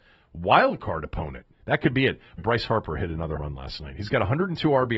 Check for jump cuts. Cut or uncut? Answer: cut